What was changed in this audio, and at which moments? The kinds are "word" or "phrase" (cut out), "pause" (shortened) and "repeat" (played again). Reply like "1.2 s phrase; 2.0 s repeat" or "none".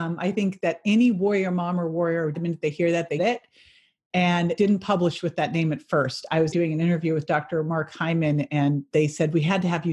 2.3 s word; 3.2 s word; 4.6 s word; 6.5 s word